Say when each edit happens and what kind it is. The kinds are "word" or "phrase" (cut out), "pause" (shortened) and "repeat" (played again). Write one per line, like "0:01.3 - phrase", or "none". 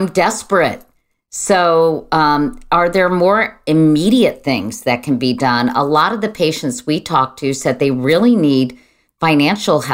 none